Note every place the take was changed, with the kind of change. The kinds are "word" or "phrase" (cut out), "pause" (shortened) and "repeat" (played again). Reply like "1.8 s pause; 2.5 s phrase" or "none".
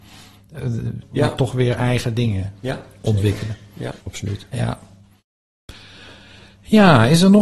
1.0 s word; 4.0 s pause